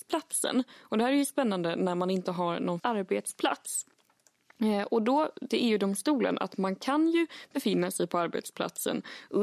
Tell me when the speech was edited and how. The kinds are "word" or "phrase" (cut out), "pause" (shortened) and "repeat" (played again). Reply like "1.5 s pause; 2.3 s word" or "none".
2.8 s word; 5.5 s word